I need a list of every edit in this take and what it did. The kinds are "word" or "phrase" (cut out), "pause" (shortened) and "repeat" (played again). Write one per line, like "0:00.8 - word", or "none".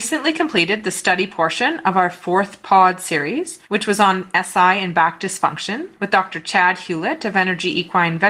0:03.6 - pause
0:06.0 - pause